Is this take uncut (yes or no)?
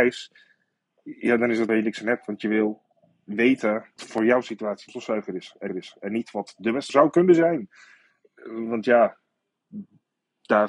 no